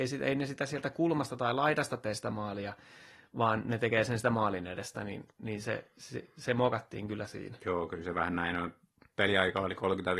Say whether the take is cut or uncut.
uncut